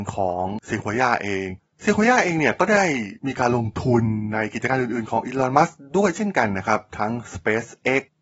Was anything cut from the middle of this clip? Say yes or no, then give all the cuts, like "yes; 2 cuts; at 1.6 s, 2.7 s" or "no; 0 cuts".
yes; 1 cut; at 3.2 s